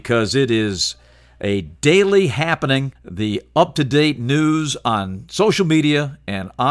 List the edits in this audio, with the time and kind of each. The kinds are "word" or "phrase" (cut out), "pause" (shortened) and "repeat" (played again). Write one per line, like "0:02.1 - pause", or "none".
0:03.0 - pause